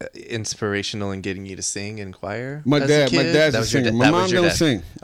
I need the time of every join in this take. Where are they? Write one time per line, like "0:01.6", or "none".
none

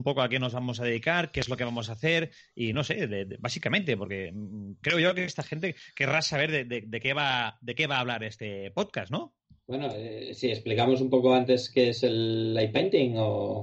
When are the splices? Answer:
none

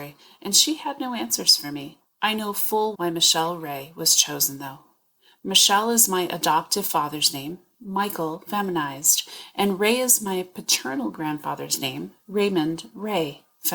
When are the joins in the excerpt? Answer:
0:02.9

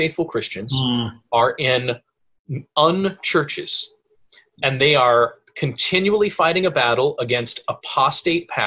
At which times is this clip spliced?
none

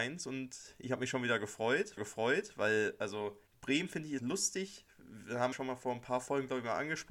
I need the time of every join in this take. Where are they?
0:02.0
0:03.5
0:04.2
0:05.5

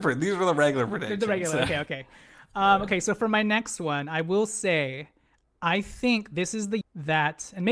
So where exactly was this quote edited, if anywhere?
0:06.8

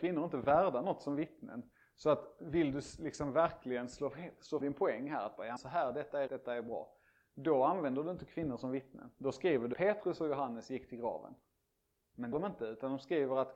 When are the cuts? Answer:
0:04.6
0:05.6
0:06.3
0:09.7
0:12.3

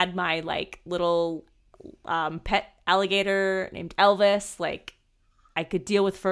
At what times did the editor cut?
none

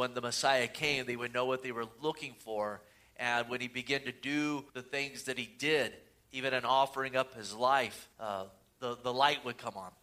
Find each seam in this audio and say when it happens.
0:04.7
0:08.1

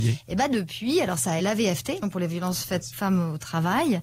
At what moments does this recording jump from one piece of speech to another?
0:01.4
0:02.0
0:02.9

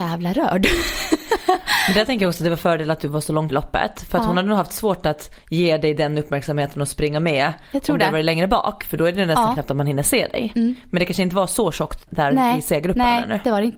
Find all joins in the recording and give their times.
0:03.5
0:12.1

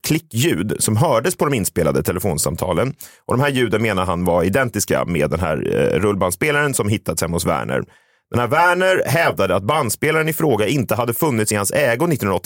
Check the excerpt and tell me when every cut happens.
none

